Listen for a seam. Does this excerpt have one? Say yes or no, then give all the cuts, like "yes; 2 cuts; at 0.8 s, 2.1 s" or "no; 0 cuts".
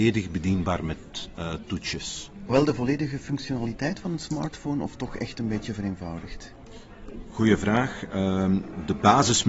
no; 0 cuts